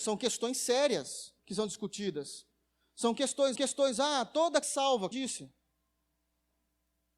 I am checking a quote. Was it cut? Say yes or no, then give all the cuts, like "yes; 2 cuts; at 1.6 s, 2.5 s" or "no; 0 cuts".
yes; 4 cuts; at 1.4 s, 3.6 s, 4.6 s, 5.1 s